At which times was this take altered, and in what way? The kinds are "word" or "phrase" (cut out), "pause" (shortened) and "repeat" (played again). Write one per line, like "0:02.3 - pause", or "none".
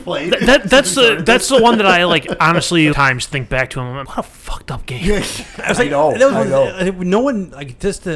0:02.9 - phrase
0:04.0 - word